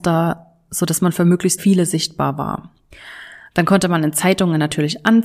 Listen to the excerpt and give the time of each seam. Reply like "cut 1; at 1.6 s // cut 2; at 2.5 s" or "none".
cut 1; at 1.6 s